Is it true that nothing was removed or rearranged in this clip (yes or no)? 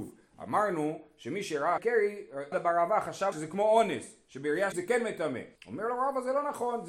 no